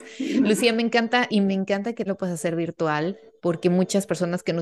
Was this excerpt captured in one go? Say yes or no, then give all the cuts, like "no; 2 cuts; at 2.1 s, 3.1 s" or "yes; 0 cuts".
no; 2 cuts; at 1.3 s, 2.1 s